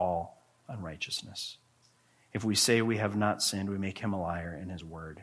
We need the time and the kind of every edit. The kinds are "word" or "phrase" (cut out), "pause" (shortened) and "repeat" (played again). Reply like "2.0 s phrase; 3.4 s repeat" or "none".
none